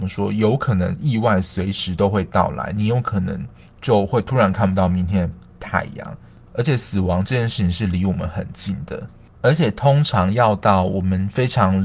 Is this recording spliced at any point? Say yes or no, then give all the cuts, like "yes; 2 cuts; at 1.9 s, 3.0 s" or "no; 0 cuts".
no; 0 cuts